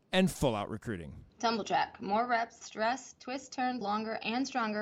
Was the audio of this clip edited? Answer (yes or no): yes